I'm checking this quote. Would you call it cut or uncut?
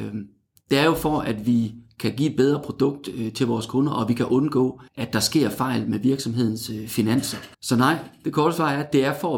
cut